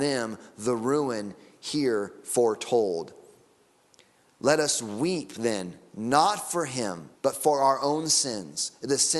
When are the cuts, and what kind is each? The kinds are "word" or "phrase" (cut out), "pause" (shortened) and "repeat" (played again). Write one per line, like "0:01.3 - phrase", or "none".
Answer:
0:07.1 - pause